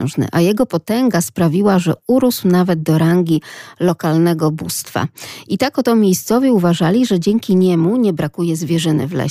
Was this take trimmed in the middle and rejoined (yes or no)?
no